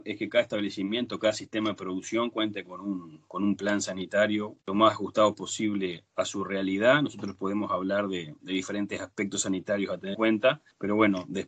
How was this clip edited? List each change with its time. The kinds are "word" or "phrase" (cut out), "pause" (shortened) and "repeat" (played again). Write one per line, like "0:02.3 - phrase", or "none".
0:04.6 - pause
0:10.1 - word